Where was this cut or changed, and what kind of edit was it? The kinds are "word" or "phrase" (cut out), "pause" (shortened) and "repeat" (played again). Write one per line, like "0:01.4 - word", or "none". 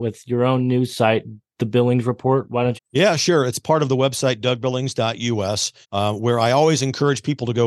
0:02.8 - phrase
0:05.8 - pause